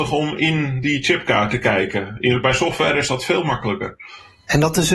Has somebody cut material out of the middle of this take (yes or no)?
no